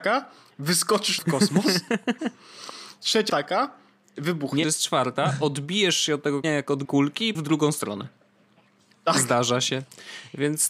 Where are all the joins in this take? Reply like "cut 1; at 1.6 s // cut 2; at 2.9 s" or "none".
cut 1; at 1.2 s // cut 2; at 3.3 s // cut 3; at 4.6 s // cut 4; at 6.4 s // cut 5; at 6.8 s // cut 6; at 7.3 s